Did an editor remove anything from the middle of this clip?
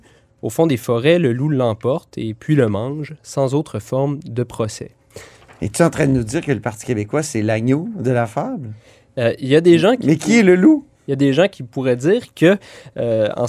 no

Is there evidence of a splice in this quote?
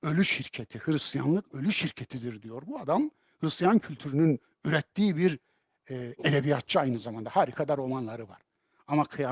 no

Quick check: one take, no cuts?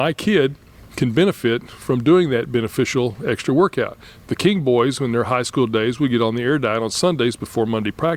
yes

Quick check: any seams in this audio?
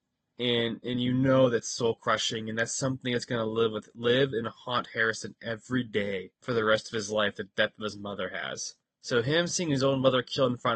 yes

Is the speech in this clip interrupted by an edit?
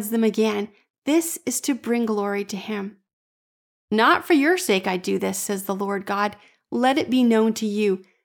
no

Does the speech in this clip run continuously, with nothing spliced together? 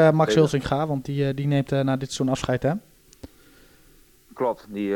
yes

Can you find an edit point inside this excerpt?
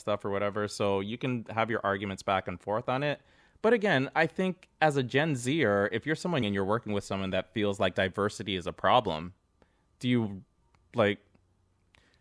yes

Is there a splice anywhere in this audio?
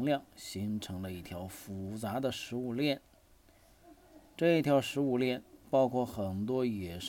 yes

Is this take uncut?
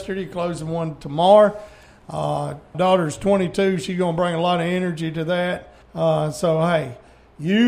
no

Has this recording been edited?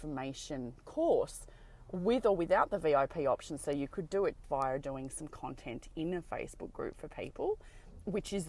yes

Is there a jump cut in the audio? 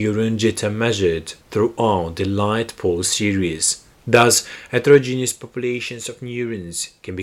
yes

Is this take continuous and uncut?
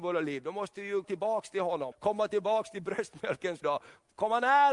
no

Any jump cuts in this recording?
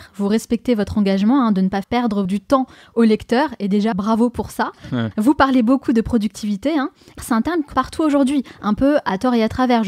yes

